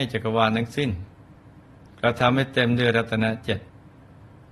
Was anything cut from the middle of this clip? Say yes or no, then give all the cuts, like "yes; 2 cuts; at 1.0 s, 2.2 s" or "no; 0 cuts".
no; 0 cuts